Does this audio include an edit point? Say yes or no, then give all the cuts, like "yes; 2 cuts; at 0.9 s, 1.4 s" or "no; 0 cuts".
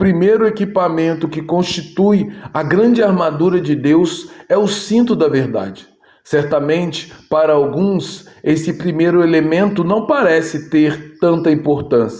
no; 0 cuts